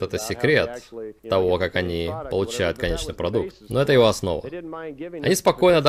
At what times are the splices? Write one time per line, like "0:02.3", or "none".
0:01.2